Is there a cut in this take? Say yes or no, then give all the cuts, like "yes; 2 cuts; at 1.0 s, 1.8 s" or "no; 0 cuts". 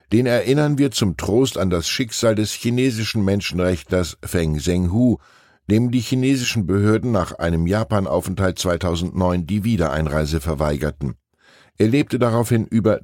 no; 0 cuts